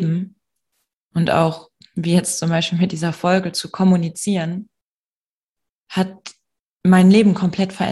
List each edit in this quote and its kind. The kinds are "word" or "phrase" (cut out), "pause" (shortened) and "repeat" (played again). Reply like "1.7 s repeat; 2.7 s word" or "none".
none